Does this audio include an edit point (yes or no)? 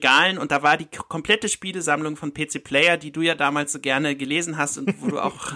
no